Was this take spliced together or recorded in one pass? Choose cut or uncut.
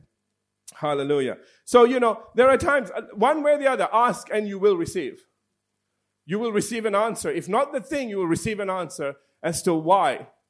uncut